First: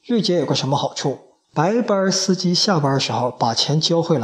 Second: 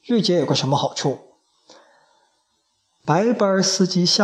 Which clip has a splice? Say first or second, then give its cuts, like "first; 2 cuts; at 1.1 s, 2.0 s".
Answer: first; 1 cut; at 1.4 s